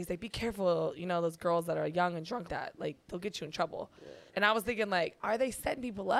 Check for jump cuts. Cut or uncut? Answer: cut